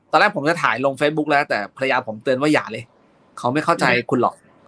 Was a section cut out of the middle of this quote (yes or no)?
no